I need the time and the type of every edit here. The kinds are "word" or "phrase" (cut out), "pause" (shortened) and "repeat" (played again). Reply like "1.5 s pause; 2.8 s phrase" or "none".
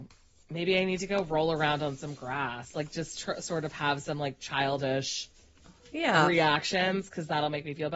none